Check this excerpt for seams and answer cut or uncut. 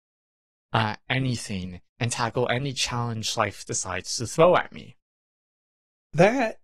cut